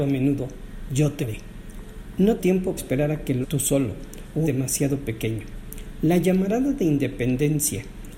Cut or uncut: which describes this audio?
cut